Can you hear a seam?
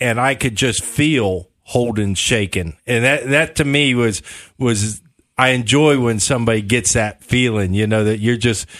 no; 0 cuts

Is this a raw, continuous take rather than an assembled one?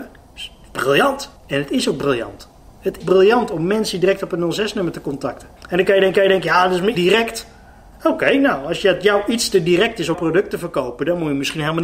no; 6 cuts; at 1.4 s, 3.0 s, 5.6 s, 6.2 s, 7.0 s, 10.1 s

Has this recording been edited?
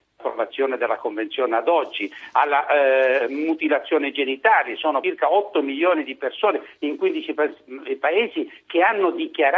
no; 0 cuts

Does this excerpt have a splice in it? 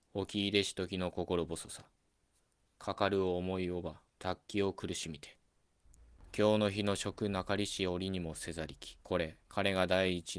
yes; 3 cuts; at 4.1 s, 9.0 s, 9.4 s

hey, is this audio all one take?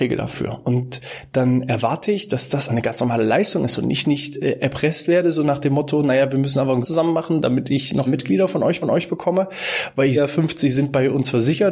no; 5 cuts; at 2.7 s, 6.8 s, 8.1 s, 8.8 s, 10.1 s

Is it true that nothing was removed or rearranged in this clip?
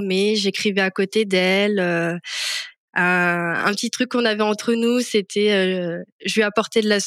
yes; 0 cuts

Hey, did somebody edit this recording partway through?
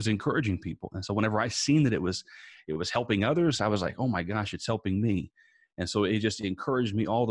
no; 0 cuts

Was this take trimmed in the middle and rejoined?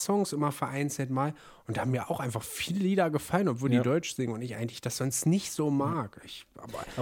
no; 0 cuts

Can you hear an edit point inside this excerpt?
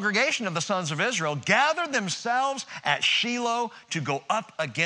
no; 0 cuts

